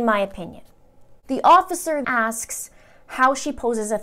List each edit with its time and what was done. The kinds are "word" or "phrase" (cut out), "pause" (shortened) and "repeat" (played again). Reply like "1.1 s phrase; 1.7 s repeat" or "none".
2.0 s word

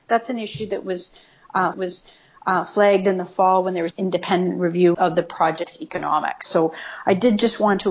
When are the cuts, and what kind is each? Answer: 1.7 s repeat; 3.9 s phrase; 4.9 s word

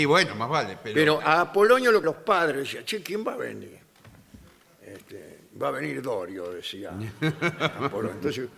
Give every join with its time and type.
1.2 s word; 2.0 s word

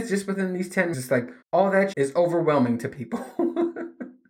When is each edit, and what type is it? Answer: 0.9 s phrase; 1.4 s pause; 1.9 s word

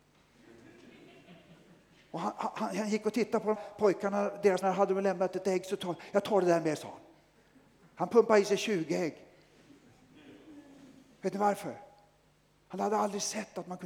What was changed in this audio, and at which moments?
3.5 s word; 4.6 s word

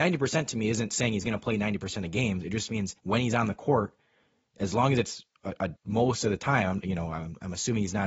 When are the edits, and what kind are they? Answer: 3.0 s pause; 5.8 s pause

